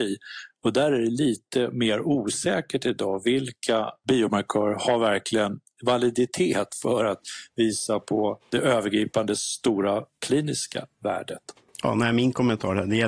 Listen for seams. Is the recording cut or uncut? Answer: uncut